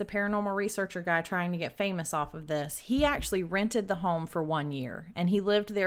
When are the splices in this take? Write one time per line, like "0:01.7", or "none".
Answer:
none